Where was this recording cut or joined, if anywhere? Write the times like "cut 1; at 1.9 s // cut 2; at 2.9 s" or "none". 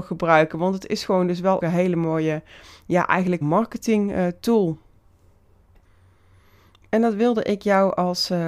cut 1; at 1.6 s // cut 2; at 3.4 s